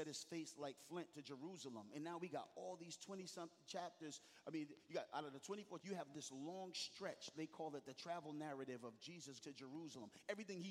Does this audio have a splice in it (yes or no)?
yes